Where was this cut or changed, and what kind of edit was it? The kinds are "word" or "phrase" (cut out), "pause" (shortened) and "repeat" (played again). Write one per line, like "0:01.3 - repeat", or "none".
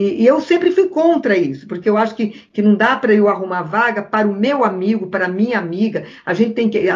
none

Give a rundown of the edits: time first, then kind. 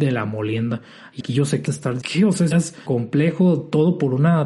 0:01.2 - word
0:01.7 - word
0:02.0 - word
0:02.5 - word
0:02.9 - word

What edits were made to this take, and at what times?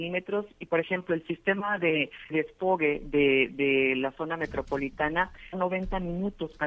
0:02.3 - word
0:05.5 - phrase

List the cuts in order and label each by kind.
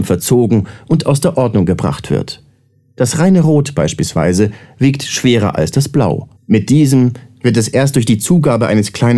0:06.4 - pause

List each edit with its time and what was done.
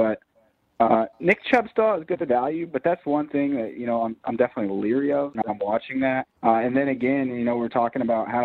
0:01.1 - pause
0:06.4 - pause

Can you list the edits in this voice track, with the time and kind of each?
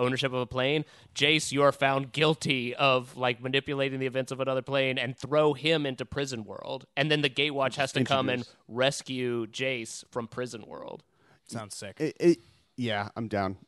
none

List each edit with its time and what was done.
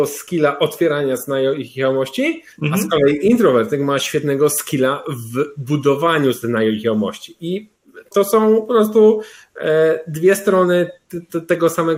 0:02.5 - pause
0:08.1 - word

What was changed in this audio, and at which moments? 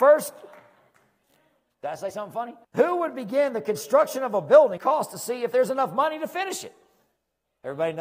0:02.6 - pause
0:04.8 - phrase

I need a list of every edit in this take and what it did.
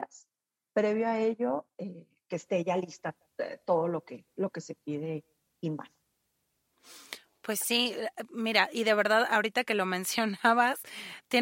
none

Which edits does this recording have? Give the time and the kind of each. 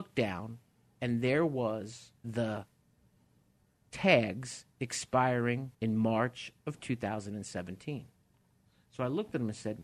0:02.2 - pause
0:05.7 - pause

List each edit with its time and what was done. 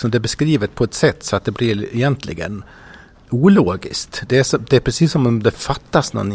none

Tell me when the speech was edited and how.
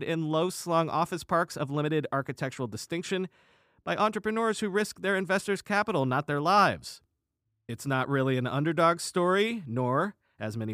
none

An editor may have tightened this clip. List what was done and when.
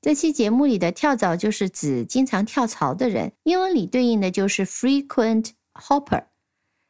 0:03.4 - pause
0:05.7 - word

